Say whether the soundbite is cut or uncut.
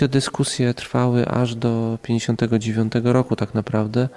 uncut